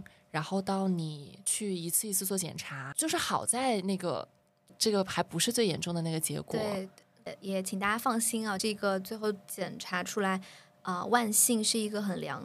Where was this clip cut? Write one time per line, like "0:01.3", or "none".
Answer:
none